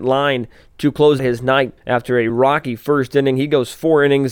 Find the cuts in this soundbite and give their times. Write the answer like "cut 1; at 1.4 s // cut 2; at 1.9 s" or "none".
cut 1; at 1.2 s // cut 2; at 1.8 s // cut 3; at 2.3 s

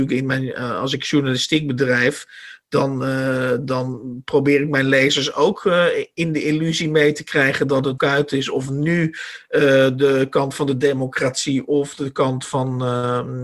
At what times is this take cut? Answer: cut 1; at 8.0 s

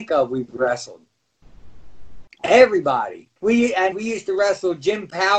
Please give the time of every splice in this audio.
cut 1; at 3.4 s // cut 2; at 3.9 s

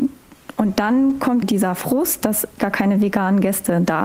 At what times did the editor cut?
cut 1; at 1.4 s // cut 2; at 2.6 s

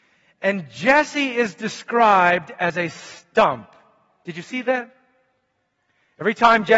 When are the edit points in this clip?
none

